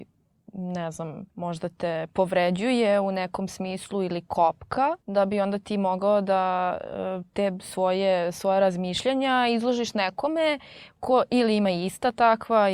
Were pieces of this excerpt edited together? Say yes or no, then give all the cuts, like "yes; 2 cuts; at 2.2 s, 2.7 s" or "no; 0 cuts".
yes; 2 cuts; at 1.3 s, 5.0 s